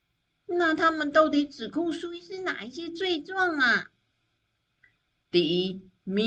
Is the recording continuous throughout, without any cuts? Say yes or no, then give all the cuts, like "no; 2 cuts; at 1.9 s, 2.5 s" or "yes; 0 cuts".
yes; 0 cuts